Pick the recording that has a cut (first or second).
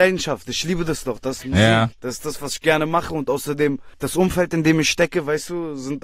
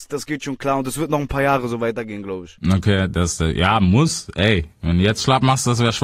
first